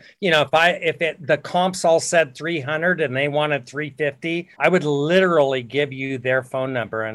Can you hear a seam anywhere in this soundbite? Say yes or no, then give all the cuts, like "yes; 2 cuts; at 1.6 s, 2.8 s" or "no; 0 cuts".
yes; 1 cut; at 4.5 s